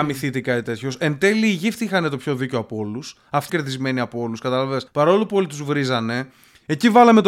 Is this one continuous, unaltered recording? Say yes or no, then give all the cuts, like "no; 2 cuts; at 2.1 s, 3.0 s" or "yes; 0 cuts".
no; 2 cuts; at 3.5 s, 4.9 s